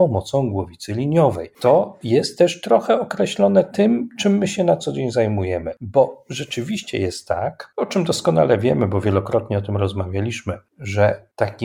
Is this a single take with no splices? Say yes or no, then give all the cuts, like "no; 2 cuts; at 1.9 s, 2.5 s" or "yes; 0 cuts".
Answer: yes; 0 cuts